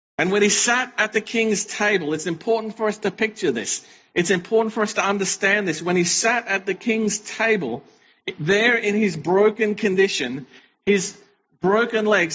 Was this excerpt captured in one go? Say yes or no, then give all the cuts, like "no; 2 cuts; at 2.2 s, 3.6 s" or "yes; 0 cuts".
yes; 0 cuts